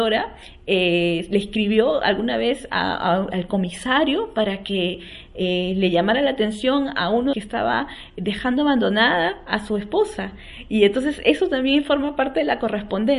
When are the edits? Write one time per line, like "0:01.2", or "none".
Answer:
0:07.3